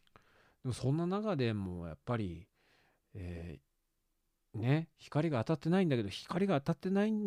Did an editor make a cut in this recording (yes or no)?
no